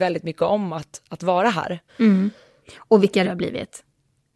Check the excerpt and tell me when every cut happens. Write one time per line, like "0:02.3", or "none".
0:01.9
0:03.2